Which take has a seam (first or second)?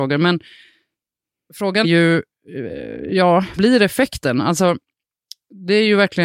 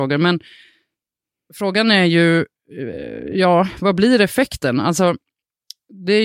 first